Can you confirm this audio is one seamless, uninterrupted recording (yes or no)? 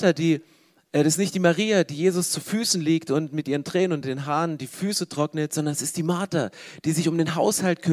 yes